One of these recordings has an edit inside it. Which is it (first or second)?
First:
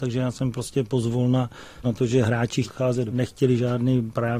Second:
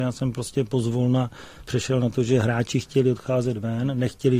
first